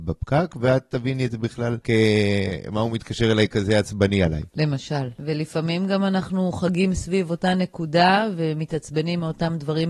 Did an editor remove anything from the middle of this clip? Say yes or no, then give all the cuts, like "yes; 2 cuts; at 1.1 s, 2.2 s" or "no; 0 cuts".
no; 0 cuts